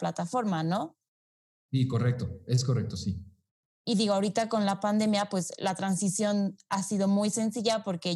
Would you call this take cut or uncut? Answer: uncut